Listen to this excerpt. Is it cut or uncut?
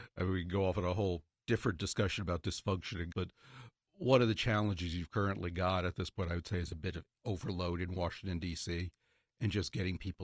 cut